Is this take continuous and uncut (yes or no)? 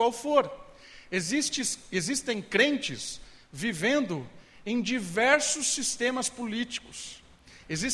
yes